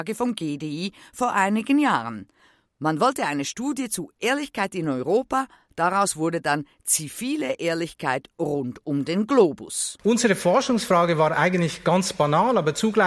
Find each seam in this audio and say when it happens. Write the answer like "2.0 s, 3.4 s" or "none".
none